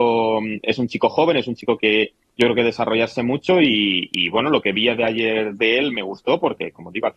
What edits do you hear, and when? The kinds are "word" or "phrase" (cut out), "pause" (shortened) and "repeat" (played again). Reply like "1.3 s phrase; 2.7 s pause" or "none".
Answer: 1.8 s word; 4.1 s word